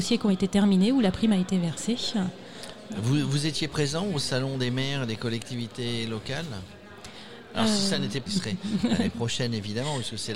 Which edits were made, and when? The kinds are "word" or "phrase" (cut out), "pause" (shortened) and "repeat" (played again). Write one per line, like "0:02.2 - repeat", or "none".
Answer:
0:08.3 - phrase